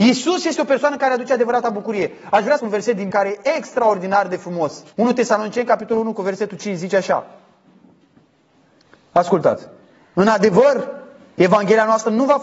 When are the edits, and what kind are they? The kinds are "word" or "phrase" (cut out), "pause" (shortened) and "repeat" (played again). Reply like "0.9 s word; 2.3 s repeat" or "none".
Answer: 2.6 s phrase; 3.1 s word; 4.9 s pause